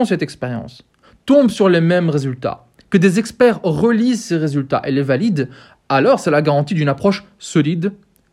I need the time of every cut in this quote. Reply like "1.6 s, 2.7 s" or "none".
none